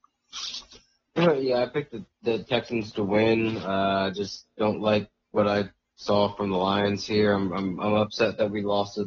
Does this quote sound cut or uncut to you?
uncut